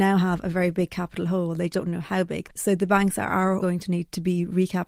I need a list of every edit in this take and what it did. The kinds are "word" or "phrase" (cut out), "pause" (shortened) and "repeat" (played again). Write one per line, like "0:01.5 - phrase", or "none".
0:01.7 - word
0:03.6 - word